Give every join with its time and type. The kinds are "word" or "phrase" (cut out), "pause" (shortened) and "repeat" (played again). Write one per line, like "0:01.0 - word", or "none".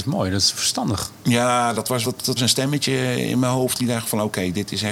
0:02.0 - word
0:02.4 - word